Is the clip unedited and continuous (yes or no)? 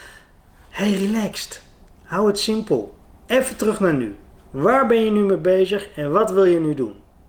yes